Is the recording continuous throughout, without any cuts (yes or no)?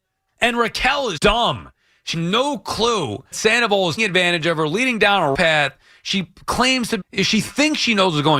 no